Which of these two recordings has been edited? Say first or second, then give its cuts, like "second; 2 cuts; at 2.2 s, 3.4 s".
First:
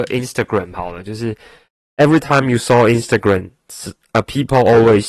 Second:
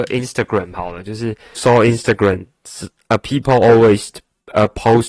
second; 1 cut; at 1.6 s